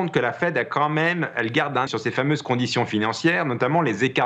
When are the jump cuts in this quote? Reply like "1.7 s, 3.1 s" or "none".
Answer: 1.9 s